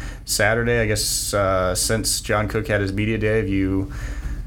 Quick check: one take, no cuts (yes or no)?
yes